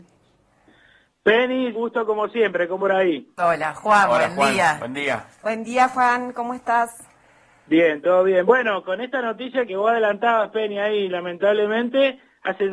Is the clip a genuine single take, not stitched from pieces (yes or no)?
no